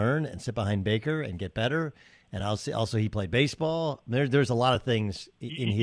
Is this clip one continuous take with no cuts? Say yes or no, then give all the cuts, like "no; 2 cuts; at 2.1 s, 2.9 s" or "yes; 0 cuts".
yes; 0 cuts